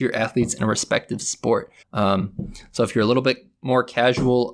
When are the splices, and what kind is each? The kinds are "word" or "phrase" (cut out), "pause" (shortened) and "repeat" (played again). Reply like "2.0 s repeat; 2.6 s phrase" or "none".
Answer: 1.8 s pause